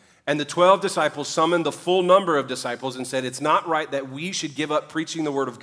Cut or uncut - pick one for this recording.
uncut